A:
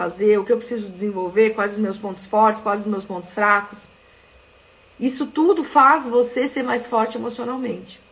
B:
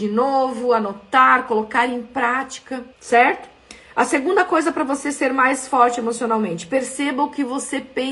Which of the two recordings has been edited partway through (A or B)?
B